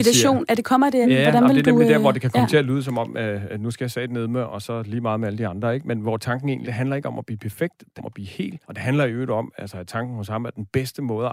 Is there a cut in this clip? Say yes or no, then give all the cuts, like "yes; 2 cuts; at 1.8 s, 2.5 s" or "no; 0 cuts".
yes; 4 cuts; at 1.0 s, 6.6 s, 8.0 s, 8.6 s